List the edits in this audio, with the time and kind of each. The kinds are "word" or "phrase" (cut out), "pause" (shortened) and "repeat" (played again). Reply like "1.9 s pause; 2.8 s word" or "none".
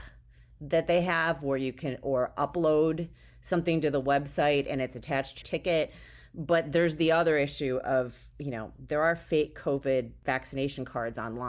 5.4 s word